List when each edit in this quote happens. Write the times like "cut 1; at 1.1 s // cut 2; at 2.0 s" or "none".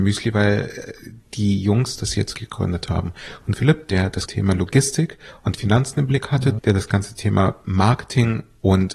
cut 1; at 2.3 s // cut 2; at 3.5 s // cut 3; at 4.3 s // cut 4; at 6.6 s // cut 5; at 7.6 s